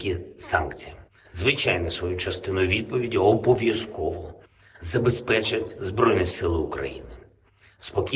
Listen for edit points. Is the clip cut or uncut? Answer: uncut